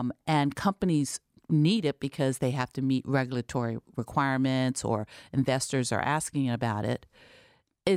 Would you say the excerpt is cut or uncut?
uncut